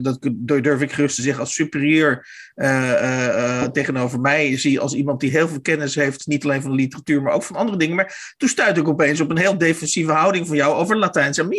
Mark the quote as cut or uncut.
uncut